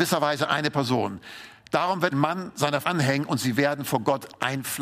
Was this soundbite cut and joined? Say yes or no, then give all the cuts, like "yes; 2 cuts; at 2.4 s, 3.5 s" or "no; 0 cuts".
yes; 2 cuts; at 2.1 s, 2.8 s